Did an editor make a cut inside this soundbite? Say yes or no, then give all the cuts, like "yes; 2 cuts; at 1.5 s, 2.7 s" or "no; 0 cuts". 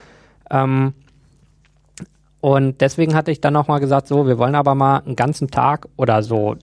no; 0 cuts